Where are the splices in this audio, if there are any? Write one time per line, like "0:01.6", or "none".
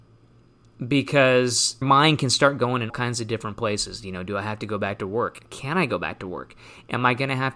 0:01.8
0:02.9